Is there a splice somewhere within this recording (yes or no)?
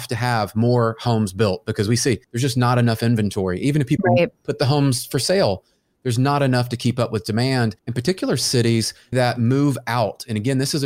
yes